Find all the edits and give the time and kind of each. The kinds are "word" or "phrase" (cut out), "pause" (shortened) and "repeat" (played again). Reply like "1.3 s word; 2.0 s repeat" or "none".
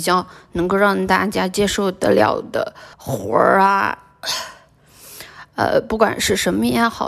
2.9 s pause